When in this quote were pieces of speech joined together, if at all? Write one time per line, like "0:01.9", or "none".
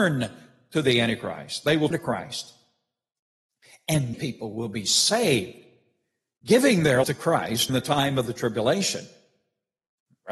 0:01.9
0:04.1
0:07.0
0:07.7